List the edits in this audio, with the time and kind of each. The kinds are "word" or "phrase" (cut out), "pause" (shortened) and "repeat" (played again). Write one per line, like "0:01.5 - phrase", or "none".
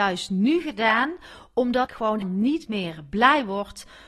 0:01.9 - word
0:02.2 - word